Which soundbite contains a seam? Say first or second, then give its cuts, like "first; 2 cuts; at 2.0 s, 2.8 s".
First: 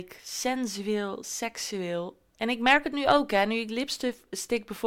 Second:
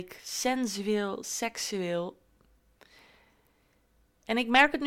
first; 1 cut; at 2.3 s